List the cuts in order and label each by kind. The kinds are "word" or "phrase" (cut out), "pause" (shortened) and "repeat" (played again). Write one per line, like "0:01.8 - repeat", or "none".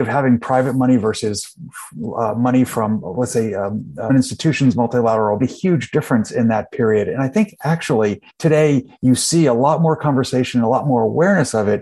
0:04.1 - word
0:05.4 - phrase
0:08.3 - pause